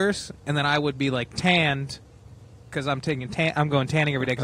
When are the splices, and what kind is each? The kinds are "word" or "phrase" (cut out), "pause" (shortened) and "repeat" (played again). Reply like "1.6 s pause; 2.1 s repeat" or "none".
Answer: none